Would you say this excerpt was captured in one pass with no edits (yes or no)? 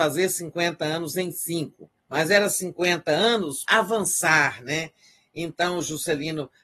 no